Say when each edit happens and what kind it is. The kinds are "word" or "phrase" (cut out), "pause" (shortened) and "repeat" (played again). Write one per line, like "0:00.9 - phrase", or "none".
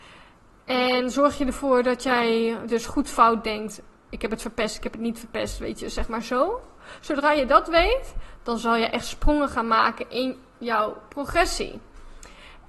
none